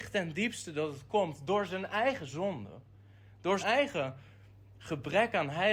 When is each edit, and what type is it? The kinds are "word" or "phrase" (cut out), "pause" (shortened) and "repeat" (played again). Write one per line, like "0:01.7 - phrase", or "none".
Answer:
0:03.6 - word